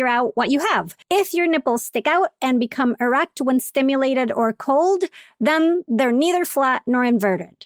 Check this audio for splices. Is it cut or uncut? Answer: cut